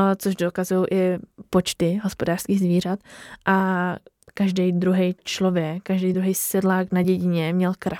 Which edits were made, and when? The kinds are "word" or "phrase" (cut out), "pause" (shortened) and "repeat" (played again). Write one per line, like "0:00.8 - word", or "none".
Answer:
none